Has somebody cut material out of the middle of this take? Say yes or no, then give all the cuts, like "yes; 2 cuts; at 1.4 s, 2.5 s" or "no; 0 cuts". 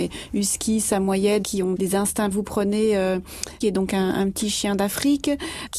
yes; 4 cuts; at 1.4 s, 1.7 s, 2.3 s, 3.6 s